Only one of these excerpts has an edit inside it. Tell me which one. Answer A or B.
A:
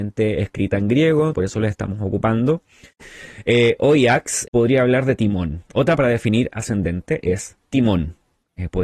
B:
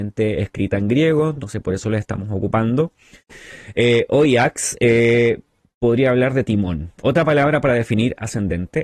A